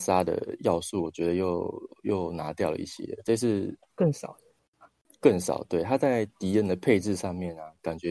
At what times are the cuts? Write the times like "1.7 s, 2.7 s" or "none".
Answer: none